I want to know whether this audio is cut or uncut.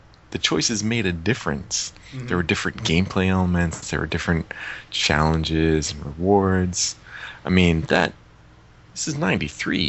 uncut